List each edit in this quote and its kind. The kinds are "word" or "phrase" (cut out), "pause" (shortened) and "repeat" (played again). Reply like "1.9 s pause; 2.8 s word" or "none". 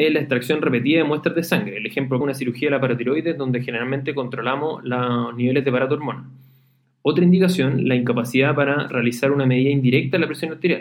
2.2 s word